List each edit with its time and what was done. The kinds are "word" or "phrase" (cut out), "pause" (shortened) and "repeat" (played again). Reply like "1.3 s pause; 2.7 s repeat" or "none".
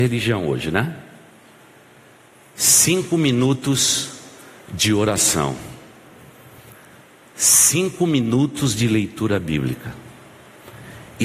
none